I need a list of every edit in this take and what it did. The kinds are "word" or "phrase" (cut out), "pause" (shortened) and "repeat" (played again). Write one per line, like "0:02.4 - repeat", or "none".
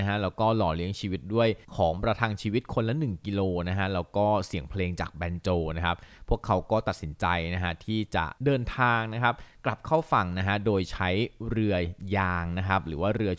0:01.6 - pause
0:08.4 - pause